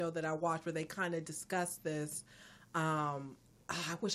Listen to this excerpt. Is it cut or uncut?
uncut